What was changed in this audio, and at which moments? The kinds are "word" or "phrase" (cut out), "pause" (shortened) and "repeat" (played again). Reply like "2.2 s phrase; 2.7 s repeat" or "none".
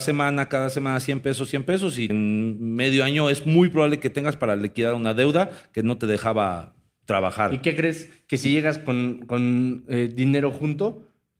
2.1 s phrase